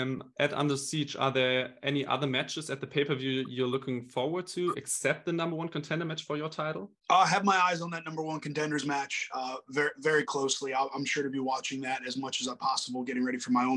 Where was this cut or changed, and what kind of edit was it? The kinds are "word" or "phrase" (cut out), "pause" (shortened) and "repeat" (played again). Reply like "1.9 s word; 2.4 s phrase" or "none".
7.0 s pause